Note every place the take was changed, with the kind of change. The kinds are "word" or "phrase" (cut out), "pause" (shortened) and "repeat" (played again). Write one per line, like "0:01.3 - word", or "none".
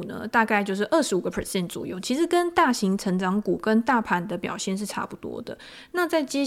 none